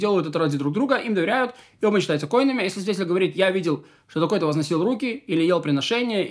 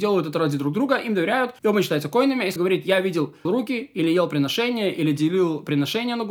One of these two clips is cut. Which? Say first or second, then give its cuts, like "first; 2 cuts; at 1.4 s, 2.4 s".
second; 3 cuts; at 1.6 s, 2.6 s, 3.5 s